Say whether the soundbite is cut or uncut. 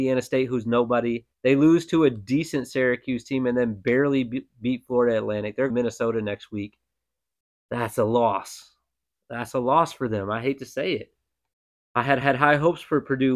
cut